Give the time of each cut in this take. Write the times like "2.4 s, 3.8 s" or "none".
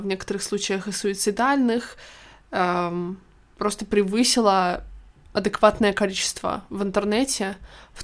none